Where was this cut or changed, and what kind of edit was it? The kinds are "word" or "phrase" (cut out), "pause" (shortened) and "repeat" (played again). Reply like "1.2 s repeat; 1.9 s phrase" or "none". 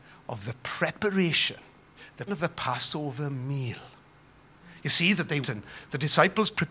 2.3 s word; 5.4 s word